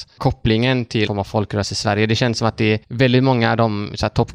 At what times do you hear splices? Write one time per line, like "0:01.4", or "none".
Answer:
0:01.1
0:02.8